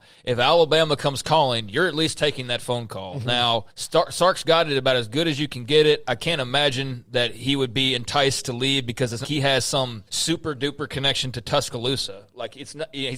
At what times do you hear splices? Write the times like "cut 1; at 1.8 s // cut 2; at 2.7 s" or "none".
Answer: cut 1; at 3.7 s // cut 2; at 9.2 s // cut 3; at 10.1 s